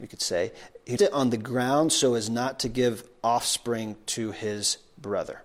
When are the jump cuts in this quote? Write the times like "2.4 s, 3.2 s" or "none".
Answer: 1.0 s

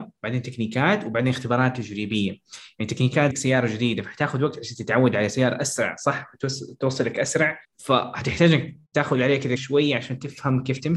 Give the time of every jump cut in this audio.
3.3 s, 7.6 s, 8.8 s, 9.6 s

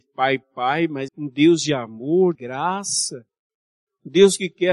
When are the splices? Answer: 1.1 s, 2.3 s

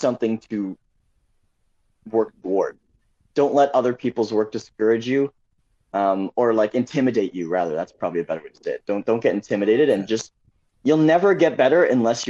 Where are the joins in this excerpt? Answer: none

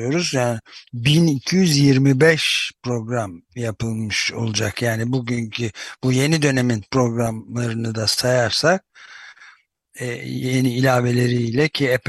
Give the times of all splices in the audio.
3.5 s

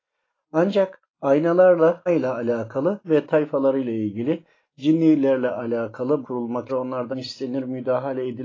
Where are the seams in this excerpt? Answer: 2.1 s, 3.0 s, 6.2 s, 6.7 s, 7.1 s

